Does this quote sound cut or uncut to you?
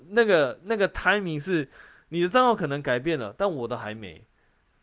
uncut